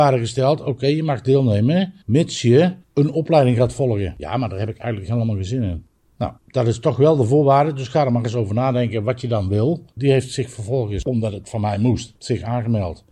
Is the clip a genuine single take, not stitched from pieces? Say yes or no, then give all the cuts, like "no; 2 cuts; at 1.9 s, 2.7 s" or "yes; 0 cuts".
no; 4 cuts; at 2.0 s, 2.8 s, 6.4 s, 12.2 s